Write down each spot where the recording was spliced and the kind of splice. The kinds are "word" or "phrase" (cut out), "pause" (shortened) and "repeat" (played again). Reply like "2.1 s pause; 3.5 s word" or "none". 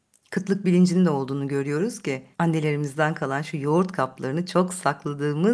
2.3 s pause

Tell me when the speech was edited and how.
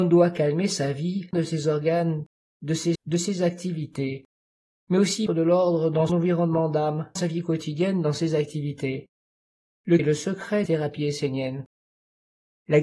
1.3 s word; 2.9 s word; 5.3 s word; 6.1 s word; 7.2 s word; 10.0 s word; 10.7 s word

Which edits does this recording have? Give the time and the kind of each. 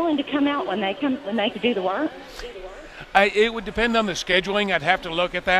1.5 s word

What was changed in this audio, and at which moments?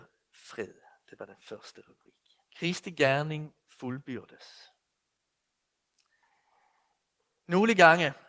2.5 s pause

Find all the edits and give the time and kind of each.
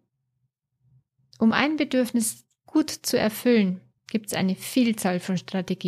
4.0 s pause

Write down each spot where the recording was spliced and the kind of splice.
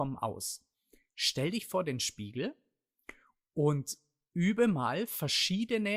none

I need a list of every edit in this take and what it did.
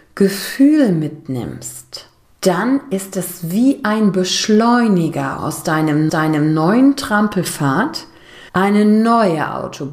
2.2 s pause; 5.4 s word; 6.1 s repeat; 8.5 s pause

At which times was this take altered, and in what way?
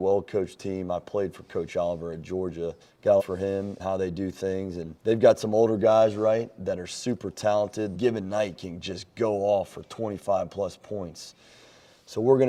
2.8 s pause; 3.2 s phrase; 3.8 s word; 5.0 s pause; 7.9 s phrase

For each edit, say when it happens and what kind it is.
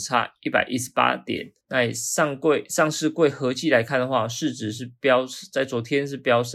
1.6 s pause

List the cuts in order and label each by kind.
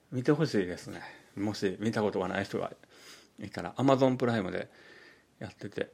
none

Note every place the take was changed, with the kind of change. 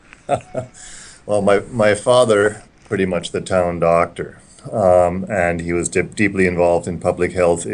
2.6 s phrase

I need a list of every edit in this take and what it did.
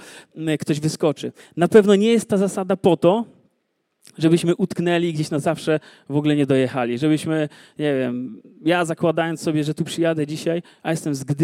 none

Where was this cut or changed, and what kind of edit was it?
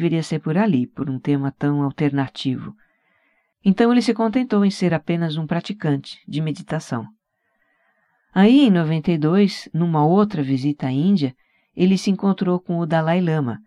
none

